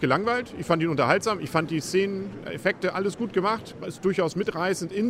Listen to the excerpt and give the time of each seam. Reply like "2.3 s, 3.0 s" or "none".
none